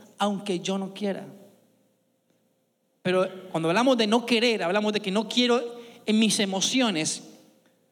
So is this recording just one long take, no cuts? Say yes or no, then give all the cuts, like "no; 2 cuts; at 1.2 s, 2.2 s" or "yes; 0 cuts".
yes; 0 cuts